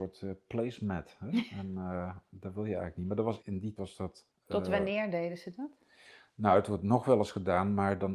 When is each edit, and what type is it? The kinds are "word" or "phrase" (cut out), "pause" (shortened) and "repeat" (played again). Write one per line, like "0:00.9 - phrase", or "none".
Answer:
0:03.4 - word
0:03.8 - word
0:04.3 - pause